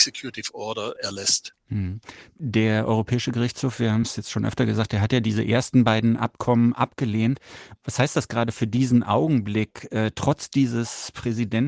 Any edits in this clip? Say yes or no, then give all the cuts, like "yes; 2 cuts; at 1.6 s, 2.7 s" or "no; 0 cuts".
no; 0 cuts